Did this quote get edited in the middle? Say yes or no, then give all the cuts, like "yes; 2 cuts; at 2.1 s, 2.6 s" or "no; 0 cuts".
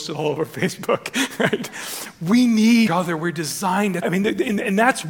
yes; 2 cuts; at 2.9 s, 4.0 s